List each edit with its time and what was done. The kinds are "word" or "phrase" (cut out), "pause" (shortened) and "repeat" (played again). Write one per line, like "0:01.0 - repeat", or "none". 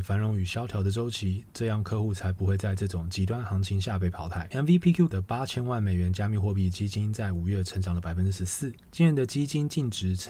0:05.1 - word